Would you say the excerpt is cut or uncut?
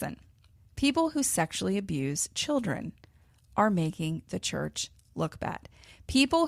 uncut